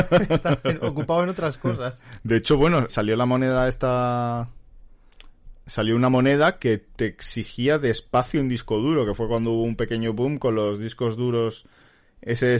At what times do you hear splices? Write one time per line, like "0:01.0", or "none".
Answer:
0:02.9
0:07.0